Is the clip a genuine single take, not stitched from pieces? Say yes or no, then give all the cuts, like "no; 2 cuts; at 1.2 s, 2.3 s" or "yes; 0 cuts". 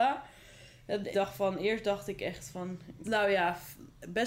no; 2 cuts; at 1.1 s, 3.0 s